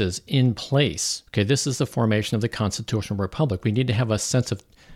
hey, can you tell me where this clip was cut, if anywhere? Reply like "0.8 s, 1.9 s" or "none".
1.3 s